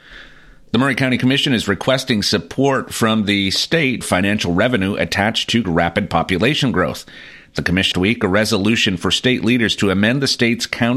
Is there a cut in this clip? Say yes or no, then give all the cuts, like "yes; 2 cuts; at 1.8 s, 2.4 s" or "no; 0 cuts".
yes; 3 cuts; at 4.0 s, 5.6 s, 7.9 s